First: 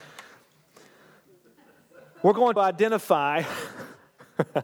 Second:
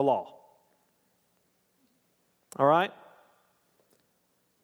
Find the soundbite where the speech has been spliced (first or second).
first